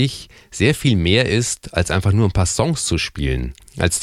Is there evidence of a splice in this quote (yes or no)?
no